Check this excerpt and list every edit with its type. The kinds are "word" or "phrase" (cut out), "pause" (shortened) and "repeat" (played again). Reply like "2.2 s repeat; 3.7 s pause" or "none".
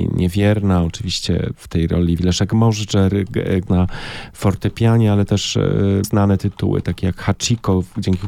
2.2 s word; 3.7 s word; 6.0 s word

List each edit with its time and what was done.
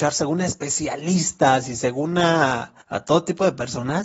2.8 s pause

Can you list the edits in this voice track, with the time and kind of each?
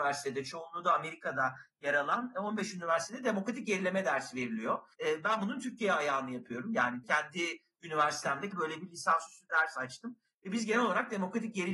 4.9 s pause; 7.0 s word; 8.5 s phrase

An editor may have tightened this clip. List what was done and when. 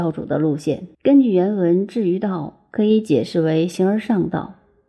0.9 s pause

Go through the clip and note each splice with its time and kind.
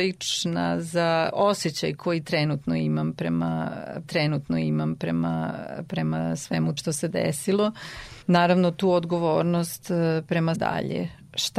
1.9 s word; 4.0 s repeat; 6.8 s word; 8.2 s pause; 10.5 s phrase

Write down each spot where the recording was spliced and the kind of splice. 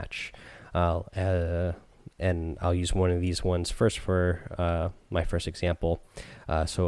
none

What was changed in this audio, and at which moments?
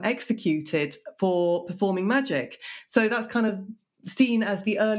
none

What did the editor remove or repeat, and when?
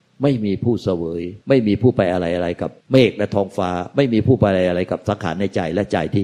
1.4 s pause; 2.8 s pause

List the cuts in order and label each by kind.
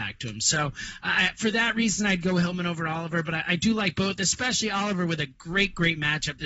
none

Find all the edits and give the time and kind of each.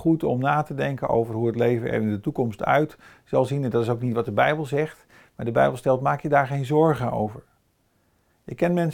none

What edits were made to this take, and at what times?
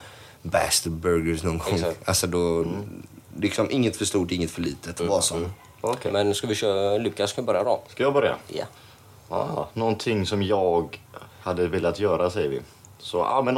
none

